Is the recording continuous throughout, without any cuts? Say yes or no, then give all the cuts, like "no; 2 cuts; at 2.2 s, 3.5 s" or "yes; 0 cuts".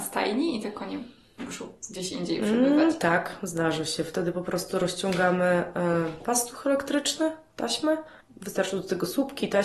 yes; 0 cuts